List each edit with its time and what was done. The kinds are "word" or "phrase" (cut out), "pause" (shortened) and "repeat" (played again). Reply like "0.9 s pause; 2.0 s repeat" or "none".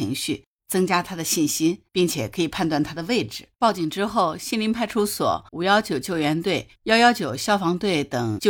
1.9 s pause; 3.5 s pause; 5.5 s pause; 6.8 s pause